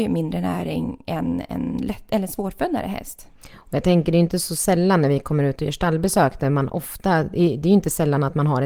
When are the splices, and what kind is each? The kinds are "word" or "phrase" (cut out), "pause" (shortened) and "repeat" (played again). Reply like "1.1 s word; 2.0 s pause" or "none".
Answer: none